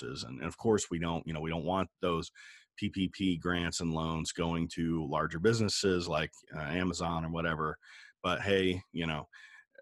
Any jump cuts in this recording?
no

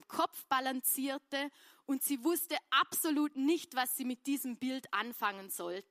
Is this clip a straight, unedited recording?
yes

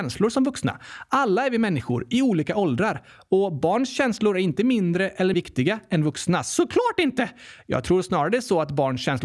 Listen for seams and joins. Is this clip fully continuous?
no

